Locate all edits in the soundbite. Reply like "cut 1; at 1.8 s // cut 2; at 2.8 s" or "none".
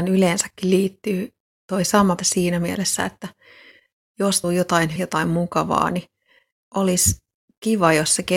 cut 1; at 2.2 s // cut 2; at 4.4 s // cut 3; at 5.0 s